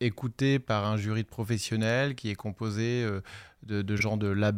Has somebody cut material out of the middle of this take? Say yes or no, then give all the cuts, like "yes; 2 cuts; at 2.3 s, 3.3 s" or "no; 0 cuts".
no; 0 cuts